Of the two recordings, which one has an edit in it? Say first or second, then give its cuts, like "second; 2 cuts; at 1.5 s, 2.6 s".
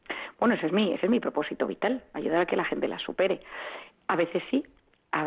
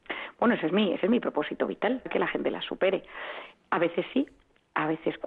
second; 1 cut; at 2.1 s